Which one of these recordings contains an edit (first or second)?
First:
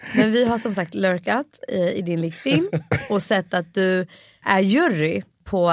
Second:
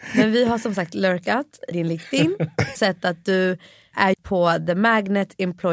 second